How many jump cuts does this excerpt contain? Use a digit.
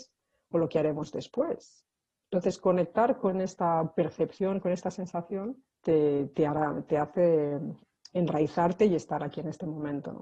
1